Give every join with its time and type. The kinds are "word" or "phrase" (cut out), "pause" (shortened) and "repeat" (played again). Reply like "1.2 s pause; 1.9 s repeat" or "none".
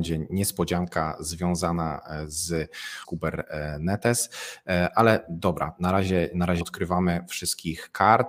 3.0 s phrase; 6.6 s word